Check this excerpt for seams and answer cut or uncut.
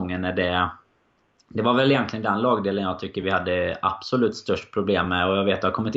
uncut